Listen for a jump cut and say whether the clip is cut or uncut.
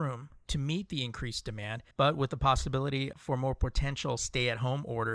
cut